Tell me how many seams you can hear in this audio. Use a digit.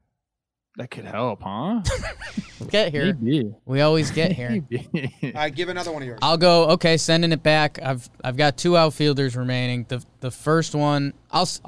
3